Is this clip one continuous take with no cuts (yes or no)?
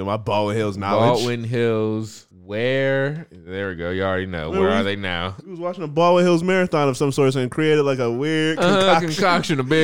no